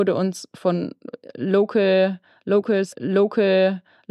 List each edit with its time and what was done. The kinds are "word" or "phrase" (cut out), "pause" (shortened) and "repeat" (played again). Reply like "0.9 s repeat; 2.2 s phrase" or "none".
2.9 s repeat

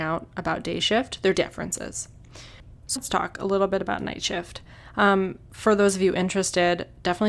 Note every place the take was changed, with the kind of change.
1.3 s word; 3.0 s word; 5.4 s pause

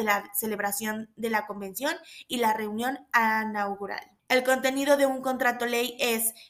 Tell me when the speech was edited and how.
4.2 s pause

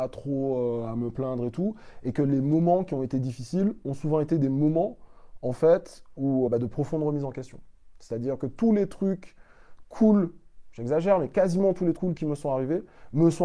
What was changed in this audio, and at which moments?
6.5 s word; 12.0 s word

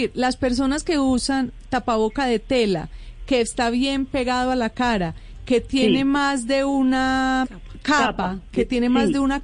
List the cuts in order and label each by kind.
7.4 s word

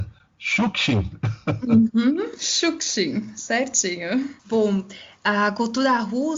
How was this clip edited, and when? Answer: 4.4 s pause

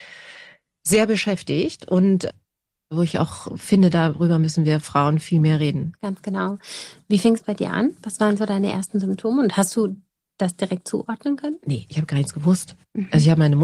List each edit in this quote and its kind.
none

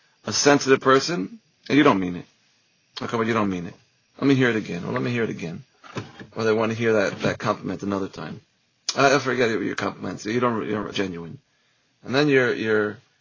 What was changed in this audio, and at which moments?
10.9 s word

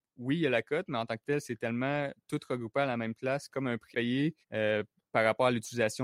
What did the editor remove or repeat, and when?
3.5 s phrase; 3.9 s word; 4.4 s pause

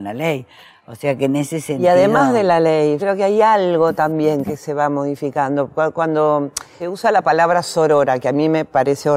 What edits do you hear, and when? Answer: 3.0 s word; 6.8 s word

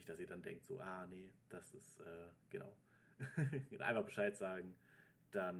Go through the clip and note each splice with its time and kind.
1.4 s pause

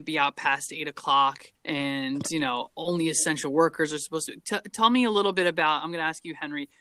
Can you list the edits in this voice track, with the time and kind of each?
1.6 s pause

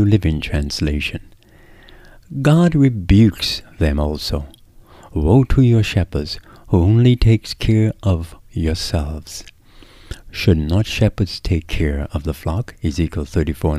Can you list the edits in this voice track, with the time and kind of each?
none

